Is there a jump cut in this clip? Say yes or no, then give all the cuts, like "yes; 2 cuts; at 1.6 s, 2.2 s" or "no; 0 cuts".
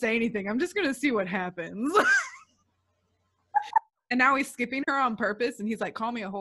no; 0 cuts